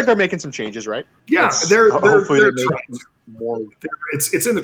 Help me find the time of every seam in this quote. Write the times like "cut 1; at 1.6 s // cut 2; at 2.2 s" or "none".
cut 1; at 1.2 s